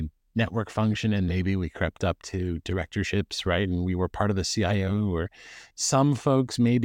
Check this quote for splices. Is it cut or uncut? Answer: cut